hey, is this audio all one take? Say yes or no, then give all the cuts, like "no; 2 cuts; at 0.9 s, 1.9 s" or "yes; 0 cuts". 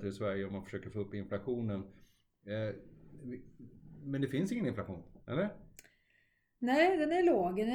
no; 1 cut; at 5.2 s